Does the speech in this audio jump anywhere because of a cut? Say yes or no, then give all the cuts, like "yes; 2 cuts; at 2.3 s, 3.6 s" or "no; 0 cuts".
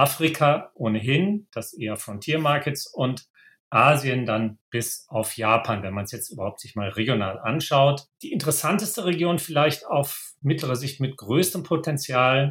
no; 0 cuts